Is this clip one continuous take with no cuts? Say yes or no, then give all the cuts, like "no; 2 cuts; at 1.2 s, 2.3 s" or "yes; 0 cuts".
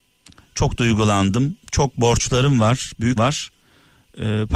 no; 1 cut; at 3.2 s